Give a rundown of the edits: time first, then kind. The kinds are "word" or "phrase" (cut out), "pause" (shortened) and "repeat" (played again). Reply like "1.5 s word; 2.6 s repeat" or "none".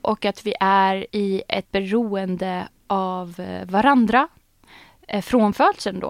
1.1 s pause; 1.6 s word